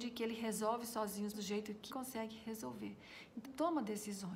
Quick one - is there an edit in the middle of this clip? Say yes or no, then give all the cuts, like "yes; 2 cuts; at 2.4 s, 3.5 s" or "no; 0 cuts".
yes; 3 cuts; at 1.3 s, 1.9 s, 3.4 s